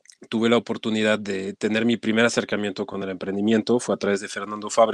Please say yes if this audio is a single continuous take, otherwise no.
yes